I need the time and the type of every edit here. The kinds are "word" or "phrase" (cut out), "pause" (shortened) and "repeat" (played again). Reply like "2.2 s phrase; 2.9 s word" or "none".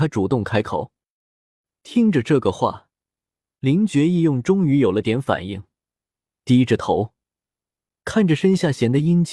none